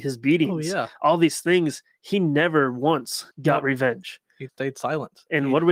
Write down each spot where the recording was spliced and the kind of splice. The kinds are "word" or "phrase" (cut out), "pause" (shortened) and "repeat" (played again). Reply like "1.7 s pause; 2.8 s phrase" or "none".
3.3 s pause; 4.5 s word